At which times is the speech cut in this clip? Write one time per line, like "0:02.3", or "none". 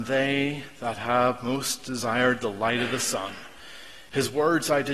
none